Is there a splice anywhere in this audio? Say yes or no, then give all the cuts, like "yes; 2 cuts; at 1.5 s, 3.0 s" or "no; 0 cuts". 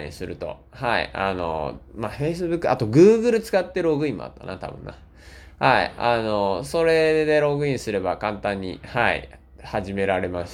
no; 0 cuts